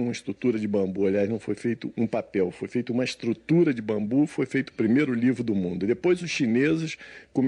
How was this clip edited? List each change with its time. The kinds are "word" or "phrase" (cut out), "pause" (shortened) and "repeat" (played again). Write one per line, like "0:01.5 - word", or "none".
none